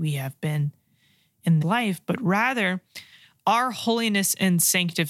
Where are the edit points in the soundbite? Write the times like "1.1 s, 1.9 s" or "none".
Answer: 1.6 s